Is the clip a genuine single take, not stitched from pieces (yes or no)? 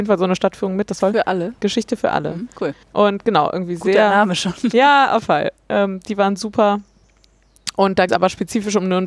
no